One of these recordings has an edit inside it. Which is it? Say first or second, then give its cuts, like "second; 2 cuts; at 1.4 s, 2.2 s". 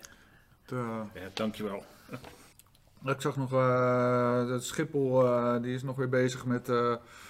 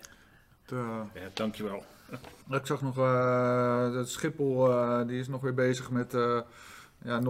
second; 1 cut; at 2.4 s